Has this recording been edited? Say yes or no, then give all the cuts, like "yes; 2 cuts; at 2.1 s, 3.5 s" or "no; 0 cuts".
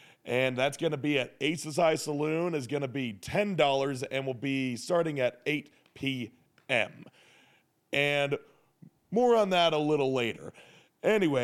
no; 0 cuts